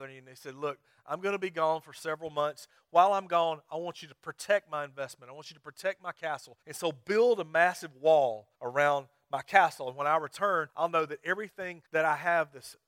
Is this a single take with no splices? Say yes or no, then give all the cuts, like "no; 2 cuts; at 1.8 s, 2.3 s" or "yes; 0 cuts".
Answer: no; 4 cuts; at 6.6 s, 8.5 s, 10.7 s, 11.9 s